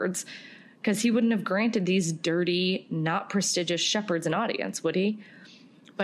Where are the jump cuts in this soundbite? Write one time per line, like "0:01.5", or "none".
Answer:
none